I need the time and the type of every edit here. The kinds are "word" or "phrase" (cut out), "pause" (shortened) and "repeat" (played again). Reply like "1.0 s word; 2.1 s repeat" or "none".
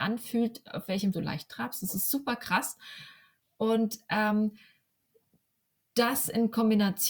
1.1 s word